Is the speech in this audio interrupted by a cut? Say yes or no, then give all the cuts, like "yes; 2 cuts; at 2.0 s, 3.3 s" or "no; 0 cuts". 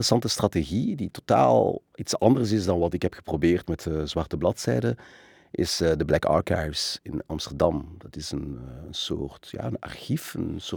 no; 0 cuts